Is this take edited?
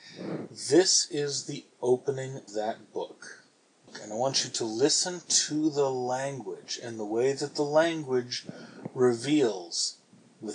yes; 1 cut; at 2.5 s

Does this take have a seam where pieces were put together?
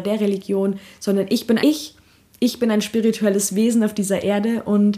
yes; 1 cut; at 1.6 s

